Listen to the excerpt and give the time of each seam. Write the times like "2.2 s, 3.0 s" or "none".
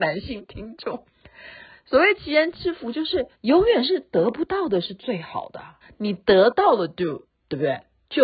3.3 s, 5.8 s